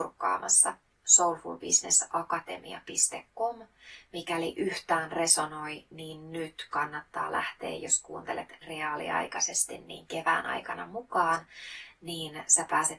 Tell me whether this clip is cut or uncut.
uncut